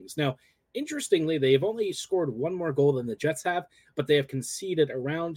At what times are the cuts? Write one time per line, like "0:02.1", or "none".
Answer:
none